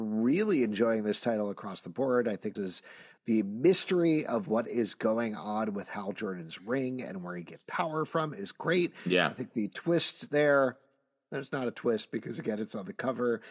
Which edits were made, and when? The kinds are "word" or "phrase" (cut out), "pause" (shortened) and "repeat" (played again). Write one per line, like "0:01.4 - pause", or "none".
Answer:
0:02.6 - word
0:07.6 - word